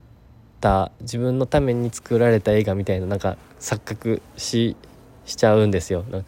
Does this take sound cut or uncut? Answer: uncut